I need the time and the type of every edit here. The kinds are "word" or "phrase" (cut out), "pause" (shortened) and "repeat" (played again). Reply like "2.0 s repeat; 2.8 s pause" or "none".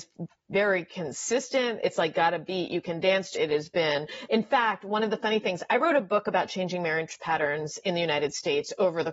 3.4 s word